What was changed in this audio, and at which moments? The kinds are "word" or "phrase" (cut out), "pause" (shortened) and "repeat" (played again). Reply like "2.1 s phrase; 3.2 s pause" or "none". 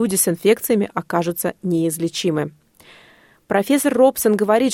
none